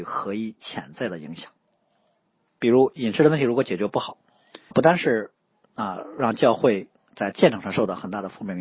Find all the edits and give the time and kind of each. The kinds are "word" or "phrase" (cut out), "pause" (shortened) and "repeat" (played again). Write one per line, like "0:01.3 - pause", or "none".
0:04.7 - word